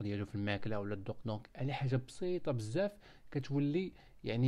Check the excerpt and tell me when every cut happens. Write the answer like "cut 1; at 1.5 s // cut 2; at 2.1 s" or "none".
cut 1; at 1.2 s